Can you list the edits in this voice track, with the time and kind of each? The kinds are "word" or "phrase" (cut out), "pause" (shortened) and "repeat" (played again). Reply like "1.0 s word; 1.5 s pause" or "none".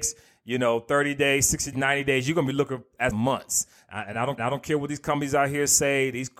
1.7 s word; 3.1 s word; 4.4 s repeat